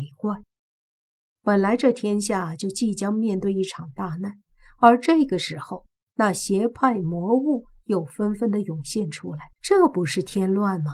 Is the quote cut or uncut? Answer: cut